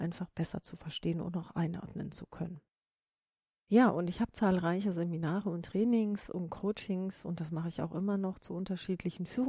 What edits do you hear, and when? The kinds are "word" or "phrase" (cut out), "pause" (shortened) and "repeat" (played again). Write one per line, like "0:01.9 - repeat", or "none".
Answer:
none

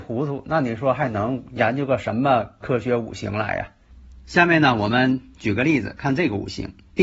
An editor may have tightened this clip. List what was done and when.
0:02.6 - word

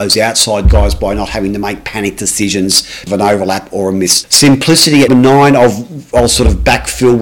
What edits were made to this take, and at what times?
0:03.1 - word
0:04.2 - word
0:05.1 - word

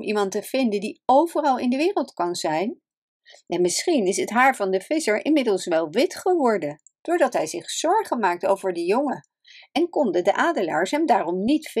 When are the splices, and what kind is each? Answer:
none

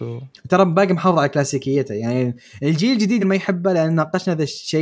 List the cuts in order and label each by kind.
0:03.2 - word

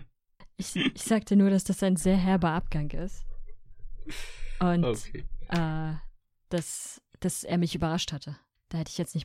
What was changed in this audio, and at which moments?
none

